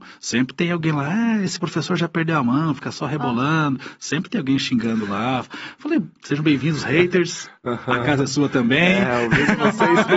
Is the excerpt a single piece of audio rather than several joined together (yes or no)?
no